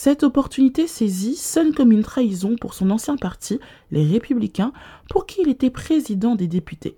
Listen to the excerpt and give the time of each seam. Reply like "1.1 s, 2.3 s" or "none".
none